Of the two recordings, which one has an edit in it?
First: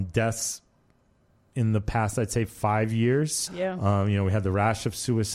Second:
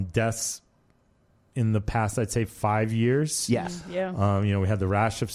first; 1 cut; at 3.5 s

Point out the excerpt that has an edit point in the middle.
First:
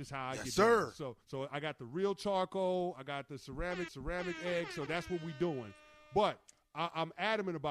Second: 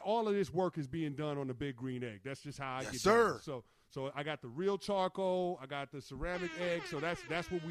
first; 3 cuts; at 1.2 s, 3.9 s, 4.9 s

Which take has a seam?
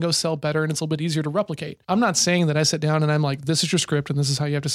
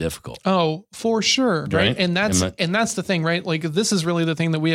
first; 1 cut; at 1.8 s

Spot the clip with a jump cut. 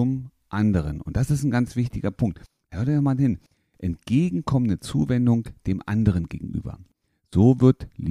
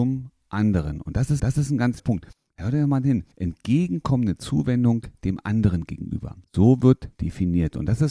second; 5 cuts; at 1.4 s, 2.0 s, 3.3 s, 6.4 s, 7.1 s

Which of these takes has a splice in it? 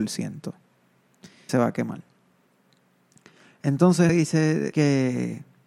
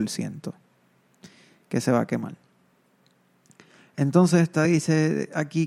first; 3 cuts; at 1.5 s, 4.1 s, 4.7 s

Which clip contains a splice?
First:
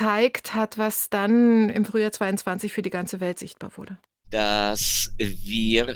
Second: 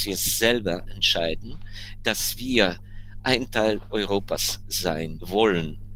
first; 1 cut; at 4.0 s

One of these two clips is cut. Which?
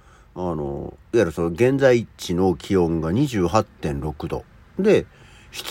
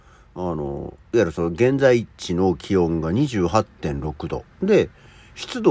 second; 1 cut; at 4.5 s

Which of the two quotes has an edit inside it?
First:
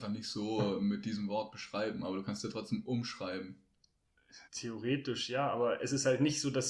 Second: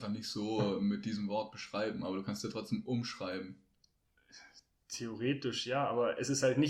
first; 1 cut; at 4.4 s

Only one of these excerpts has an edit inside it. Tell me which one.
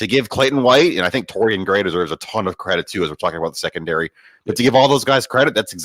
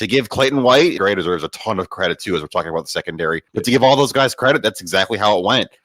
second; 2 cuts; at 1.0 s, 3.5 s

